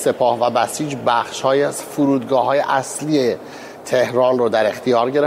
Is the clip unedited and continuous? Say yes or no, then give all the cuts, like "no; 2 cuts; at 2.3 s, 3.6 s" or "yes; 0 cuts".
yes; 0 cuts